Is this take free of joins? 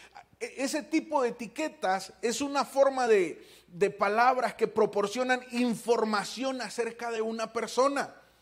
yes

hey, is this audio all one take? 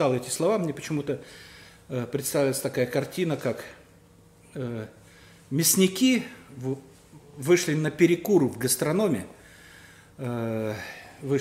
yes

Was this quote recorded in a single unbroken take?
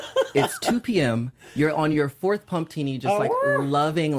yes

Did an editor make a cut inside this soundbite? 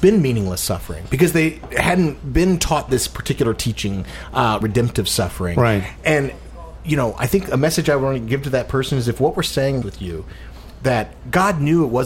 yes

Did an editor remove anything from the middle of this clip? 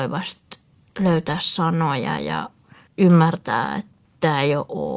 no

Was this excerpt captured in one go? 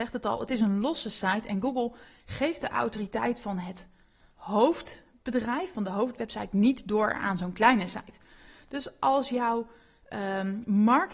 yes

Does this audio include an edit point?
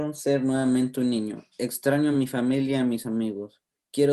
no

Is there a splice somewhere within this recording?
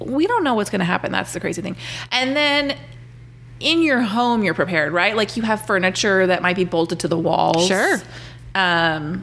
no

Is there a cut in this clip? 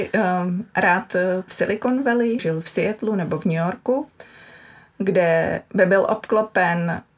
yes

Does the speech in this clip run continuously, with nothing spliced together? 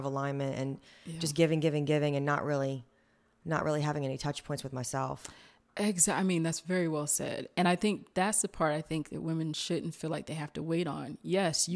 yes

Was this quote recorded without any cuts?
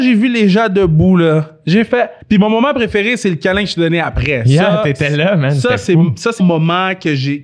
no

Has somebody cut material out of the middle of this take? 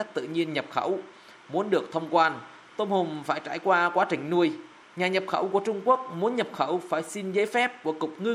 no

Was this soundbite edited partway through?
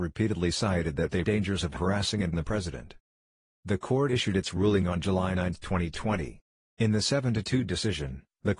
yes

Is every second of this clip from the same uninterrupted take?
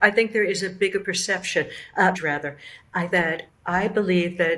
no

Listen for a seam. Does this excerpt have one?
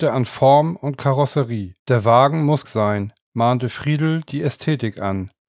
yes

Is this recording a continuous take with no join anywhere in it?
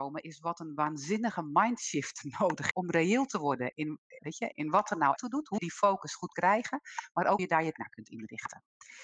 no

